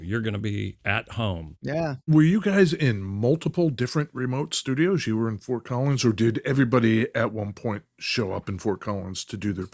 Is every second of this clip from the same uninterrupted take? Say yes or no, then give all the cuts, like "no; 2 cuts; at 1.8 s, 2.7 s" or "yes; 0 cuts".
yes; 0 cuts